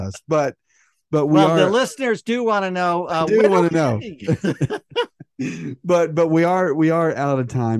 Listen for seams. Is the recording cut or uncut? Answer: uncut